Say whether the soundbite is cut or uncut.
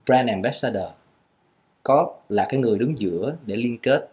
uncut